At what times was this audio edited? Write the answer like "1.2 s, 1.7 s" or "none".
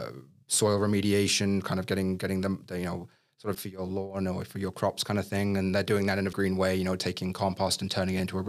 3.5 s, 6.3 s